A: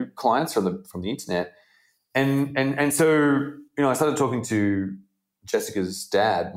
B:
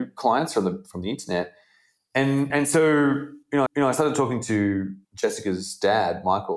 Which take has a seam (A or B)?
B